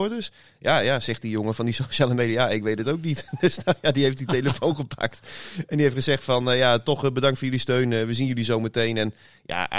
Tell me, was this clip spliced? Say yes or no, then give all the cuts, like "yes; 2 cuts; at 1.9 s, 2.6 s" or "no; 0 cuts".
no; 0 cuts